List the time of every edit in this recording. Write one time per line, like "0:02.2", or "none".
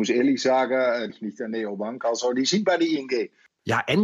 0:01.1